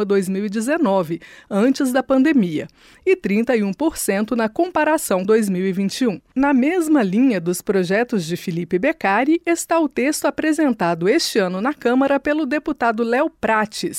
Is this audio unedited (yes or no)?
no